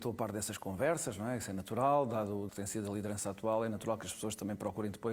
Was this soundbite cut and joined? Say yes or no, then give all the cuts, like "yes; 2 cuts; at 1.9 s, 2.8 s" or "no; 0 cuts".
yes; 1 cut; at 2.5 s